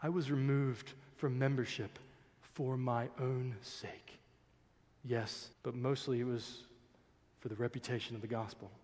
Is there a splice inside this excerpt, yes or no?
yes